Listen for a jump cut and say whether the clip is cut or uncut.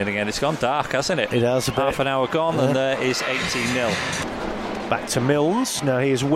uncut